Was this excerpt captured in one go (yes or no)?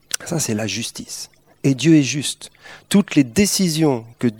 yes